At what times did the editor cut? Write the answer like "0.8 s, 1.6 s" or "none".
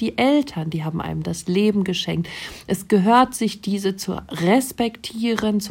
none